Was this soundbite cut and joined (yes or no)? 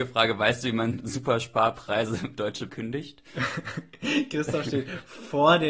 yes